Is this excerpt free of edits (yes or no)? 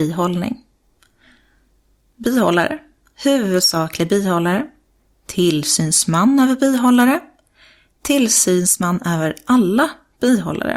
yes